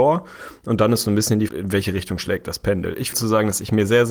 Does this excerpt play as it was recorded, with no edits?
no; 2 cuts; at 1.5 s, 3.1 s

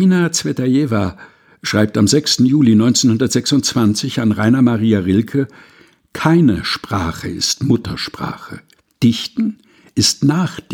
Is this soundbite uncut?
yes; 0 cuts

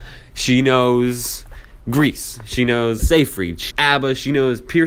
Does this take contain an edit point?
yes; 2 cuts; at 3.0 s, 3.7 s

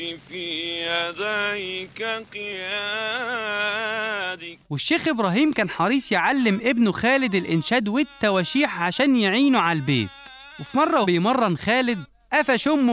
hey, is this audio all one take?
no; 3 cuts; at 4.6 s, 10.5 s, 11.0 s

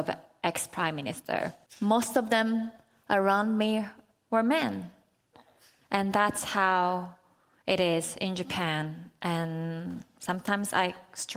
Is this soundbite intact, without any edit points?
yes; 0 cuts

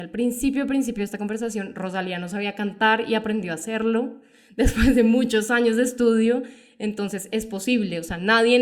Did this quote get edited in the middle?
no; 0 cuts

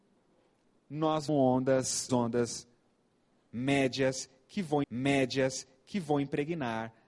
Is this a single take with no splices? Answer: no; 3 cuts; at 1.3 s, 2.1 s, 4.8 s

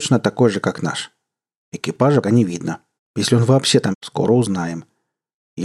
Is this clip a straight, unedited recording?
no; 3 cuts; at 2.2 s, 3.0 s, 3.9 s

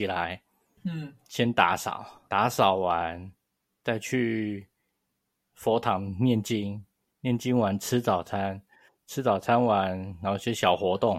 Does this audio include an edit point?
yes; 1 cut; at 2.3 s

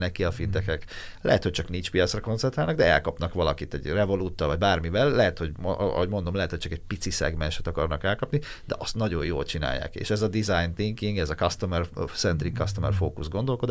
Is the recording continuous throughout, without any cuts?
yes; 0 cuts

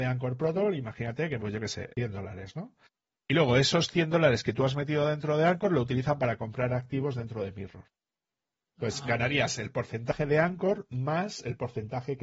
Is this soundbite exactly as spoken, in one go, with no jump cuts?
no; 2 cuts; at 1.4 s, 1.9 s

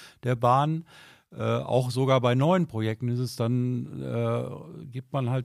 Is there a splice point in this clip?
no; 0 cuts

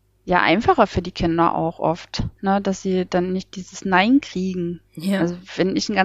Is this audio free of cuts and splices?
yes; 0 cuts

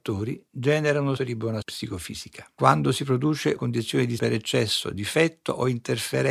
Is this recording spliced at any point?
yes; 4 cuts; at 1.2 s, 1.6 s, 3.6 s, 4.2 s

